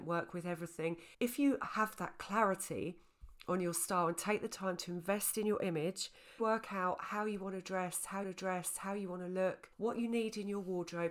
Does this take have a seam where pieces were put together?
yes; 4 cuts; at 1.1 s, 6.4 s, 8.2 s, 9.7 s

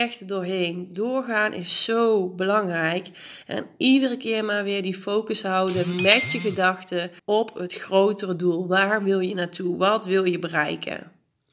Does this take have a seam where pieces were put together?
yes; 1 cut; at 7.2 s

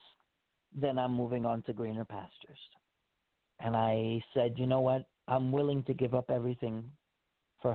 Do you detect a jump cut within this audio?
no; 0 cuts

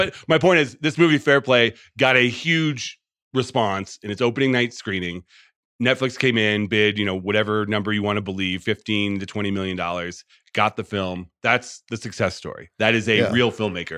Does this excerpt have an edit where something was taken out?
no; 0 cuts

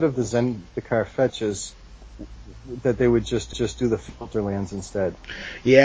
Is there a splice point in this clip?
yes; 1 cut; at 3.5 s

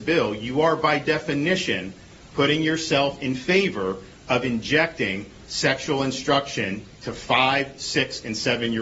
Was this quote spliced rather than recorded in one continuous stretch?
no; 0 cuts

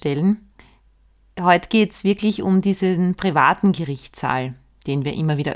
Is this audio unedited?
yes; 0 cuts

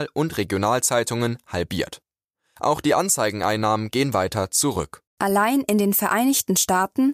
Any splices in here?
no; 0 cuts

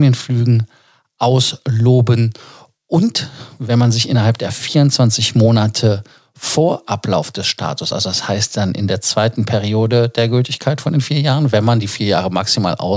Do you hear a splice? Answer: no; 0 cuts

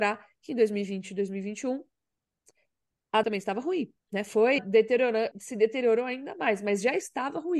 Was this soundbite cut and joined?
yes; 4 cuts; at 3.2 s, 4.0 s, 4.6 s, 5.3 s

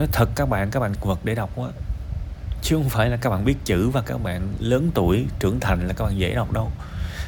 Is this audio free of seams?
no; 1 cut; at 0.9 s

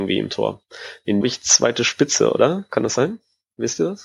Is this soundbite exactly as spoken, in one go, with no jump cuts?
no; 1 cut; at 1.2 s

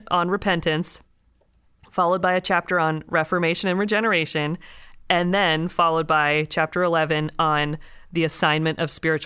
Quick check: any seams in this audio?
no; 0 cuts

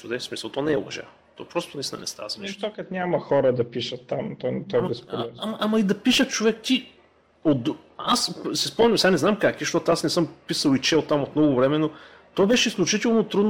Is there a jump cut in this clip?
no; 0 cuts

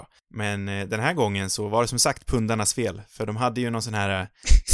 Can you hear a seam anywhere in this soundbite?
no; 0 cuts

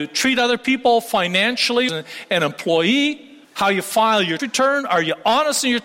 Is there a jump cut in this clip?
yes; 3 cuts; at 1.9 s, 3.4 s, 4.4 s

